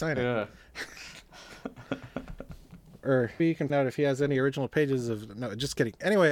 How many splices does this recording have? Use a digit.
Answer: 2